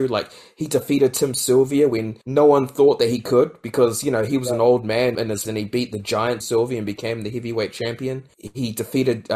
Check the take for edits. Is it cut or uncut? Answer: cut